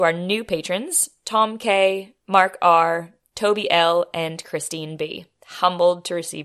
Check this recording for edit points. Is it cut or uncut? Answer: uncut